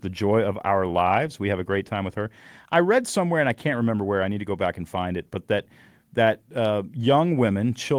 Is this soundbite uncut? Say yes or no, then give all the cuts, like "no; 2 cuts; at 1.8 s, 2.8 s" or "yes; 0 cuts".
yes; 0 cuts